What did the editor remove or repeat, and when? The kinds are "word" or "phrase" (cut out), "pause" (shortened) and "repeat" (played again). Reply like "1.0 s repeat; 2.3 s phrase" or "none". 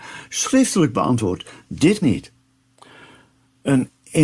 2.0 s word

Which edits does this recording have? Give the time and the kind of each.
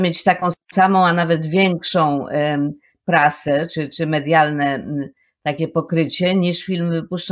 none

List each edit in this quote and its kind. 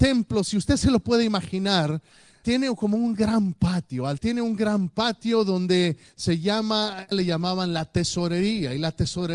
2.4 s word; 4.2 s phrase; 7.1 s phrase

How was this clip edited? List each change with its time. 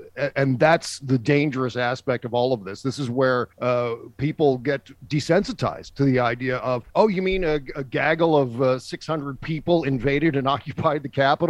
3.5 s pause; 6.9 s pause

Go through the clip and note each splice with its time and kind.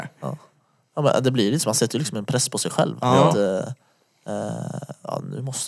none

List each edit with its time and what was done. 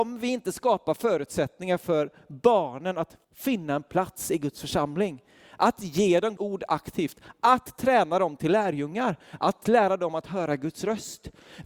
3.2 s pause; 6.4 s word

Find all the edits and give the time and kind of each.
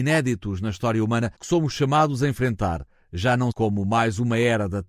1.4 s pause; 3.5 s word

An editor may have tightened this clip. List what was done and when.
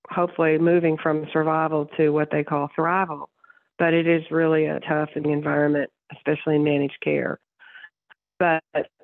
4.8 s word; 5.2 s word

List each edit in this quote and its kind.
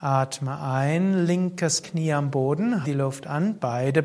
1.8 s phrase; 2.8 s word

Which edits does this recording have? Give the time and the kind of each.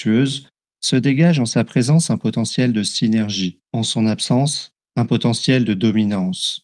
3.7 s pause

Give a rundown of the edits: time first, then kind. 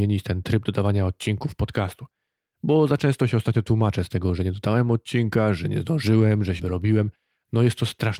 6.6 s word

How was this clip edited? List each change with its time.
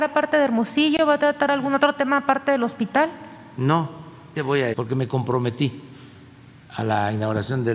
4.4 s word; 4.7 s word

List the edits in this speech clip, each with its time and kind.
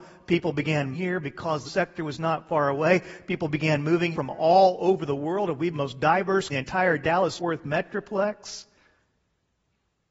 0.9 s word; 1.6 s phrase; 4.1 s word; 5.7 s phrase; 6.5 s phrase; 7.4 s word

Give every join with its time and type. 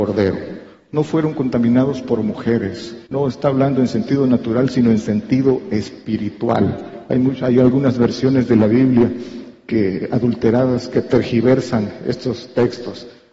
3.1 s pause

